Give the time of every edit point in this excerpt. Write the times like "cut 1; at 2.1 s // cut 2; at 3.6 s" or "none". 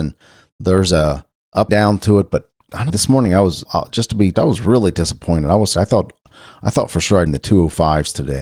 cut 1; at 1.7 s // cut 2; at 2.9 s // cut 3; at 3.7 s // cut 4; at 4.3 s // cut 5; at 5.7 s // cut 6; at 7.3 s